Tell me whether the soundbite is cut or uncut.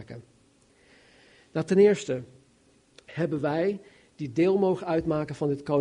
uncut